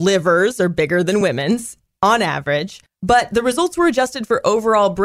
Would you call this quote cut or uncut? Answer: uncut